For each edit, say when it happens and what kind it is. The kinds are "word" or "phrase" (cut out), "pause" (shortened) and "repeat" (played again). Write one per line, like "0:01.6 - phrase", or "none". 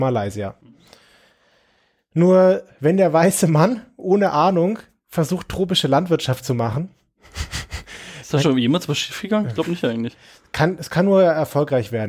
0:10.9 - word

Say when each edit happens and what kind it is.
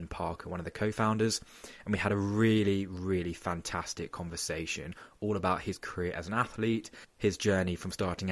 none

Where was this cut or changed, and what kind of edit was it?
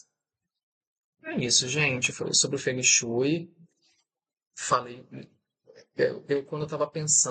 none

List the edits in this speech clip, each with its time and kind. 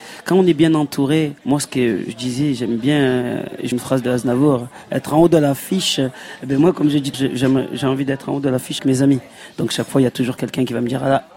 0:01.4 - pause
0:03.7 - phrase
0:07.1 - word
0:08.8 - word

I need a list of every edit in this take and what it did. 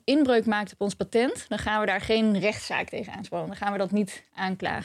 none

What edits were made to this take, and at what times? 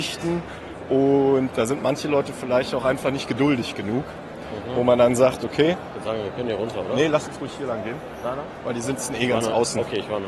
none

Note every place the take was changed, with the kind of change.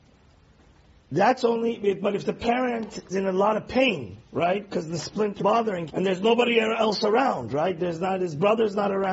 0:03.1 - word
0:05.4 - word
0:05.9 - word

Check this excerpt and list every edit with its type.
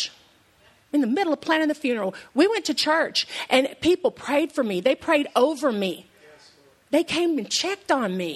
none

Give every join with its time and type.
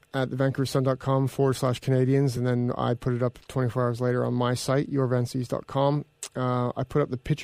none

